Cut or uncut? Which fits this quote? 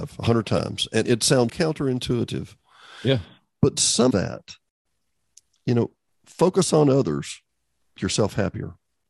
cut